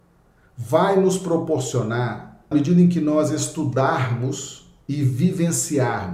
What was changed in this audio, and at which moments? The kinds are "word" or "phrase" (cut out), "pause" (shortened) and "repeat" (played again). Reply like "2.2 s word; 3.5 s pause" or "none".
2.5 s word